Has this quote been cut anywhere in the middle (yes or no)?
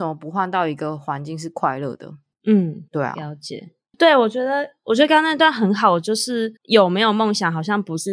yes